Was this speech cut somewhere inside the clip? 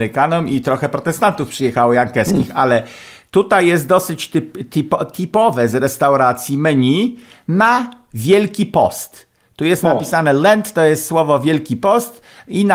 no; 0 cuts

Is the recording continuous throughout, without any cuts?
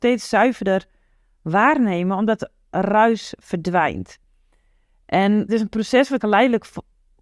no; 2 cuts; at 5.5 s, 6.2 s

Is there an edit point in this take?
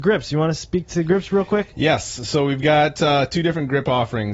no; 0 cuts

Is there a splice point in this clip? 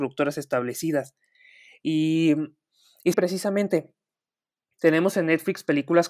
yes; 1 cut; at 3.1 s

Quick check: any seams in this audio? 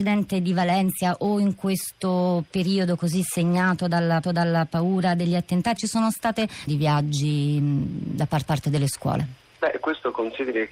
yes; 5 cuts; at 4.2 s, 5.8 s, 6.7 s, 8.4 s, 9.5 s

